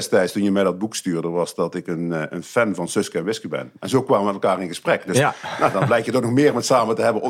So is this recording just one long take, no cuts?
yes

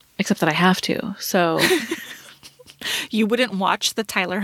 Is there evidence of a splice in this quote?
no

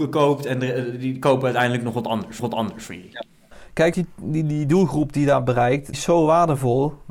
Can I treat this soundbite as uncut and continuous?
no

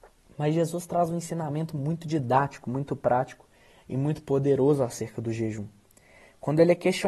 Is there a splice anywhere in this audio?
no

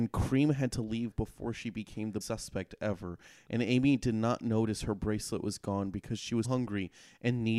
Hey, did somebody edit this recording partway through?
yes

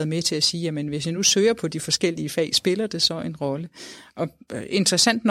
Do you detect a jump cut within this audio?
no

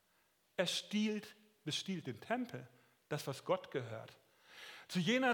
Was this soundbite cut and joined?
no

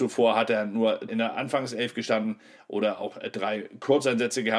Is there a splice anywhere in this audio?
yes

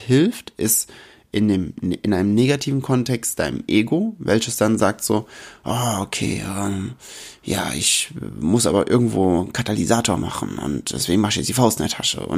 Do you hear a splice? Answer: no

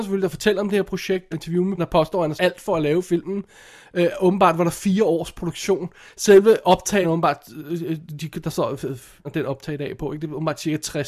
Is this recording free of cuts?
no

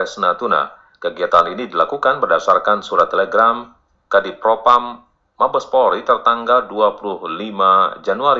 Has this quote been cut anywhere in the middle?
no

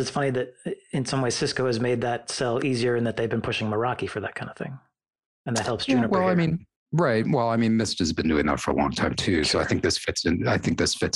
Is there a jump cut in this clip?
yes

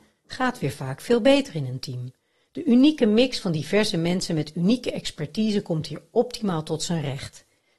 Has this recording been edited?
no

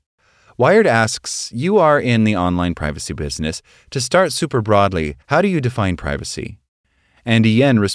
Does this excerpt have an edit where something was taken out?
yes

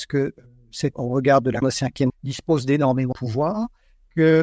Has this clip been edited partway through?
yes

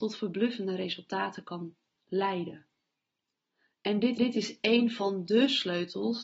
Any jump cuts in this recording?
yes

